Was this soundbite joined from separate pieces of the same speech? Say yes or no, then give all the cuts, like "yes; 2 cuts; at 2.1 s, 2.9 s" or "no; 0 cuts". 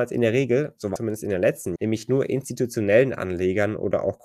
yes; 2 cuts; at 1.0 s, 1.8 s